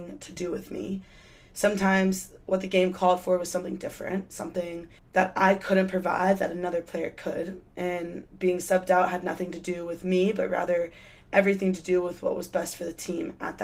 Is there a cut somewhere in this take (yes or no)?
no